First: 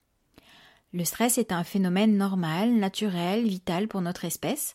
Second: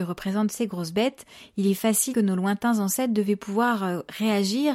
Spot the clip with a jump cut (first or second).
second